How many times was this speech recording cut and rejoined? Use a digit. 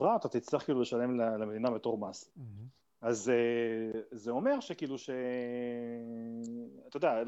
0